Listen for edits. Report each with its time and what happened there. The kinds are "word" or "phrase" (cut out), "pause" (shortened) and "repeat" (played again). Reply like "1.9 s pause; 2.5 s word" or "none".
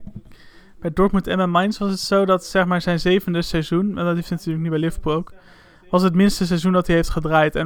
none